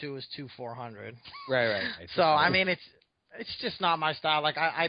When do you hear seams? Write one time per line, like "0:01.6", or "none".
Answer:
none